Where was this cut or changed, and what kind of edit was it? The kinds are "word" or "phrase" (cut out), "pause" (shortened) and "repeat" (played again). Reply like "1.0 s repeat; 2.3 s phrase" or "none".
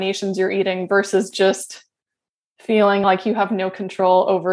none